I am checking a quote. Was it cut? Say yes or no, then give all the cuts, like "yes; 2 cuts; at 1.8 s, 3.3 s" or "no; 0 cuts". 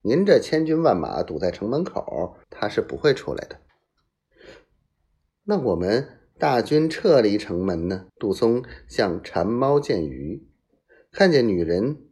yes; 3 cuts; at 2.4 s, 3.7 s, 8.1 s